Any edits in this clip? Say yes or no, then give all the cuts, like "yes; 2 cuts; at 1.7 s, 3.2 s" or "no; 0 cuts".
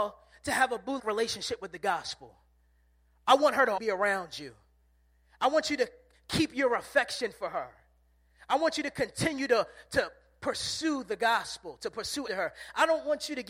yes; 3 cuts; at 1.0 s, 3.8 s, 12.3 s